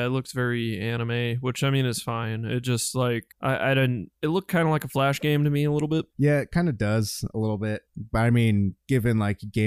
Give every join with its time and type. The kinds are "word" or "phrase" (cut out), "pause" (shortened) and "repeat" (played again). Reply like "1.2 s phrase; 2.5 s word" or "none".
3.3 s pause; 7.9 s word